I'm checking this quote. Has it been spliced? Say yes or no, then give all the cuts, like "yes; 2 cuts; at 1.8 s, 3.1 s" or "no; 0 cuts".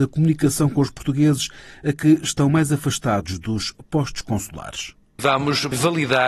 no; 0 cuts